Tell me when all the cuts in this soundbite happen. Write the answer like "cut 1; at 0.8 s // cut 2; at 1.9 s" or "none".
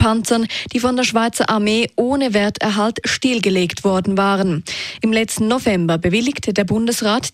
none